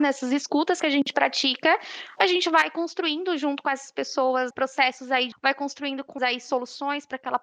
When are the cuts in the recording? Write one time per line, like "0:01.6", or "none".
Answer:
0:04.5
0:05.3
0:06.2